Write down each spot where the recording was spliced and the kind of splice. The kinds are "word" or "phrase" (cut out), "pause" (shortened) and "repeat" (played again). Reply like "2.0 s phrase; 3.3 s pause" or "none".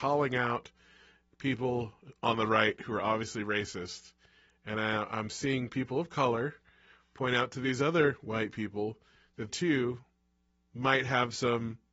9.5 s word

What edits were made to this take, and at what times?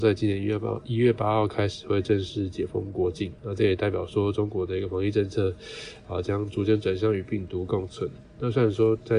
3.4 s pause

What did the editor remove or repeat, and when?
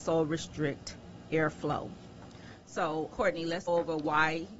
3.1 s word; 3.7 s word

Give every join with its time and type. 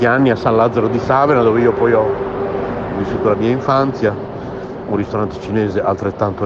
none

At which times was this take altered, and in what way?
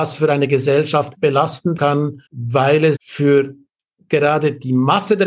1.2 s word; 1.8 s word; 2.3 s pause; 3.0 s word

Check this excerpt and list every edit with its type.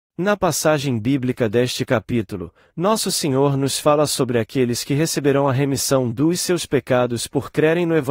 none

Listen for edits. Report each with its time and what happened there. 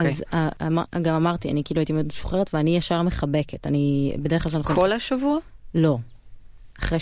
none

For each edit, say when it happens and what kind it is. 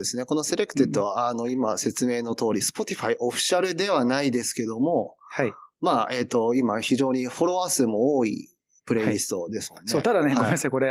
none

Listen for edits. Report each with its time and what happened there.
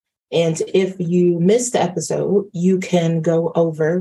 none

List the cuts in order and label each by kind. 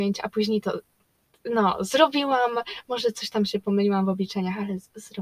none

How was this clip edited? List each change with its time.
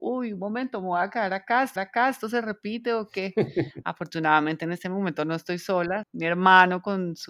1.8 s repeat; 6.0 s word

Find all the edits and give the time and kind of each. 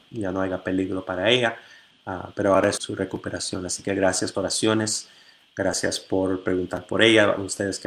2.8 s word; 4.3 s phrase

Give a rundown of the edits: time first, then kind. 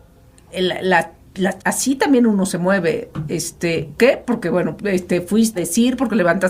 1.6 s word; 4.0 s word; 4.8 s word; 5.5 s word

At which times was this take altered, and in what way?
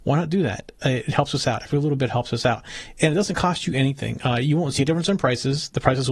none

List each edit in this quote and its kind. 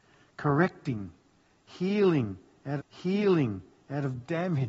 2.8 s repeat

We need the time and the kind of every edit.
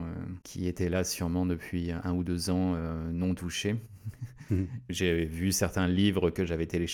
none

